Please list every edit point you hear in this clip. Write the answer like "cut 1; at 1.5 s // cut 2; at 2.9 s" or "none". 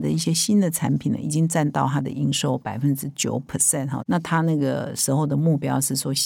none

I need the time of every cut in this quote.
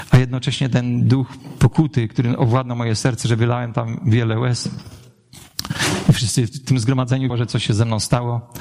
cut 1; at 7.3 s

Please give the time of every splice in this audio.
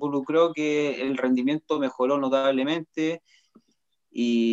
none

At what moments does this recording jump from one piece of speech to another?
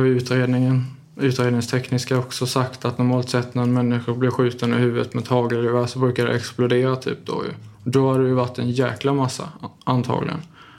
cut 1; at 7.7 s

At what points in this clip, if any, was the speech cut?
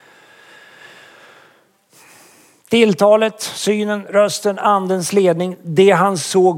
none

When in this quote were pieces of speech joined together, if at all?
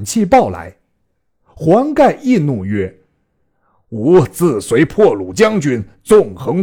none

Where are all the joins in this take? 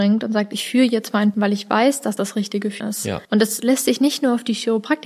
cut 1; at 1.3 s // cut 2; at 2.2 s // cut 3; at 2.8 s // cut 4; at 3.2 s

